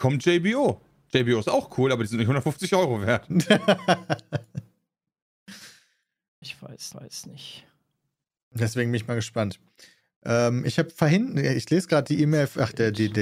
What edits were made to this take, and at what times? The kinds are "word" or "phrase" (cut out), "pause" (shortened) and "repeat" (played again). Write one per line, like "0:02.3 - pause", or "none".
0:06.4 - word
0:06.9 - repeat